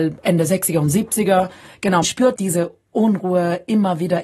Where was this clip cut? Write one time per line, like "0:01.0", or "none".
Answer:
0:02.0
0:02.4

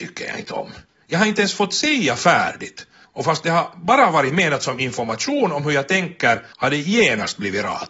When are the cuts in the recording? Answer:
0:03.0
0:06.5

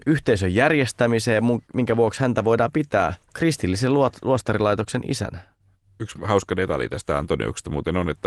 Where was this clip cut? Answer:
0:03.2

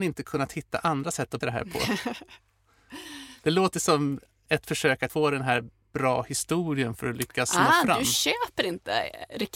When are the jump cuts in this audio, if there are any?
0:01.4
0:03.7
0:05.1

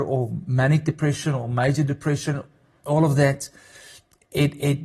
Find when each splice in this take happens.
none

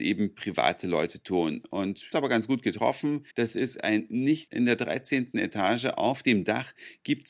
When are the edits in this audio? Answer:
0:02.1
0:03.3
0:04.5

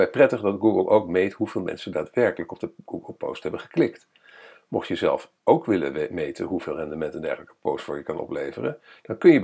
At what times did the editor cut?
0:05.4

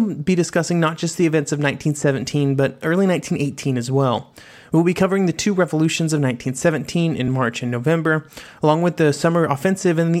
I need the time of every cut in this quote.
none

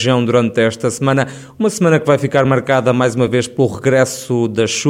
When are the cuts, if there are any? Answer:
none

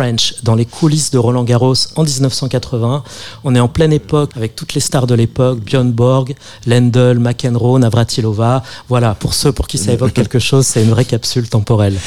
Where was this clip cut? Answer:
0:04.3

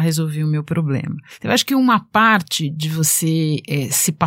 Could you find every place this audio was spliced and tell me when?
none

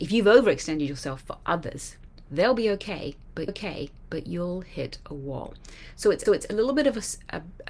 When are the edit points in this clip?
0:03.5
0:06.3

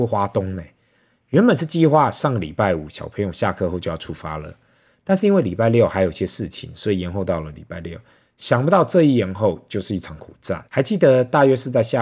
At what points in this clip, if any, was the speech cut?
0:10.7

